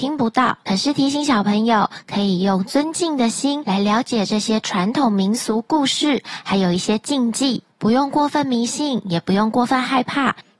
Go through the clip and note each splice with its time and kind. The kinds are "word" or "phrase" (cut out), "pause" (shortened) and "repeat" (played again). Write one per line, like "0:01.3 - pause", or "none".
0:07.7 - pause